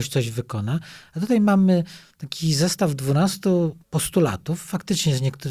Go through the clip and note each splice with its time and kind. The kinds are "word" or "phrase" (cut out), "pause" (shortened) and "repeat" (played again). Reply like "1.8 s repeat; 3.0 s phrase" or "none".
3.8 s pause